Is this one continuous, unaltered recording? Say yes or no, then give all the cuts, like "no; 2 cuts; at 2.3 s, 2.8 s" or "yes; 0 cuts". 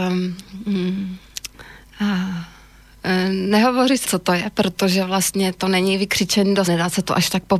no; 3 cuts; at 1.8 s, 4.0 s, 6.7 s